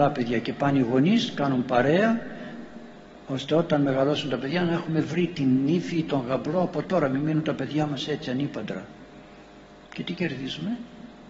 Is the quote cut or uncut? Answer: uncut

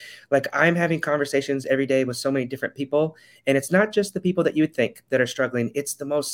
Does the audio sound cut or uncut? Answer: uncut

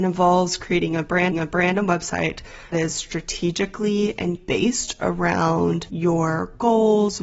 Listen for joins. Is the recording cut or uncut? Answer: cut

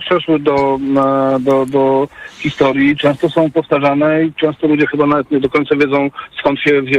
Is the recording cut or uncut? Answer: uncut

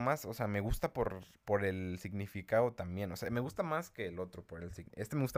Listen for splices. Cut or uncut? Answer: uncut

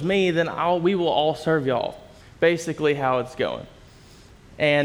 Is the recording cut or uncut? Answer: cut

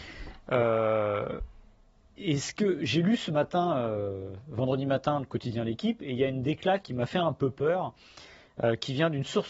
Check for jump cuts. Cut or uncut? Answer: uncut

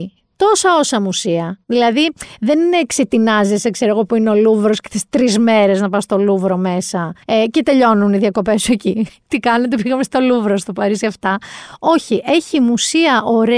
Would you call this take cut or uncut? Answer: cut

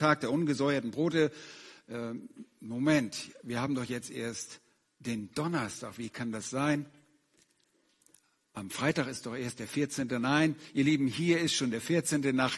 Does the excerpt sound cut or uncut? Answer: uncut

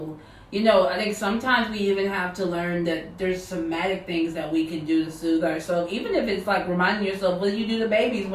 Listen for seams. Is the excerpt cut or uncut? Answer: uncut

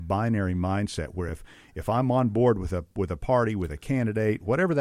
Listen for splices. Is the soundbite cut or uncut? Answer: uncut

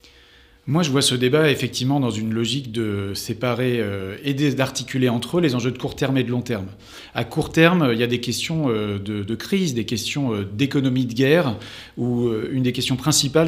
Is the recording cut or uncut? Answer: uncut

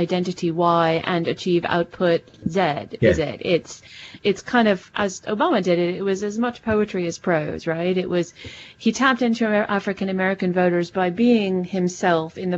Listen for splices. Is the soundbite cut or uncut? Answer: cut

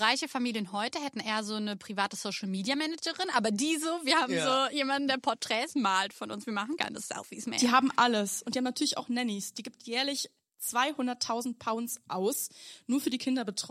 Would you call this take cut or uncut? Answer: uncut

